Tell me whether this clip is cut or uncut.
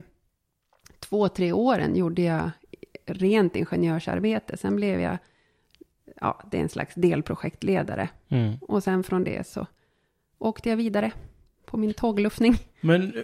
uncut